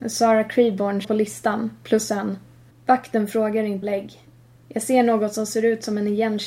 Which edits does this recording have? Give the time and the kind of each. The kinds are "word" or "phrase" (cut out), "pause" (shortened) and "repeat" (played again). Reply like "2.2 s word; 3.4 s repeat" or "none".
1.0 s word; 2.7 s pause; 3.8 s word